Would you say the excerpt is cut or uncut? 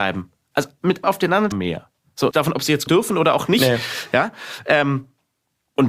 cut